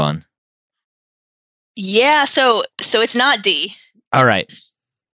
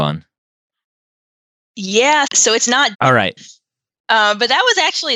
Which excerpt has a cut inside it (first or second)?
second